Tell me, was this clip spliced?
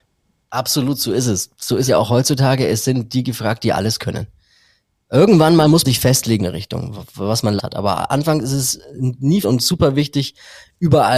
yes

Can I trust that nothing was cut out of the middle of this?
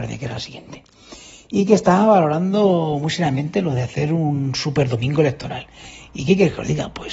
yes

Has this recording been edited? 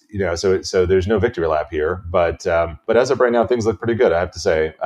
no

